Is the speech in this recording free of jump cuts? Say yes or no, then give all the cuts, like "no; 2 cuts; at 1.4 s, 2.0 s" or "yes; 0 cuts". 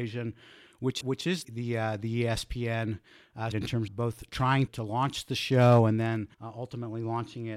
no; 6 cuts; at 1.0 s, 1.4 s, 3.5 s, 3.9 s, 4.7 s, 6.3 s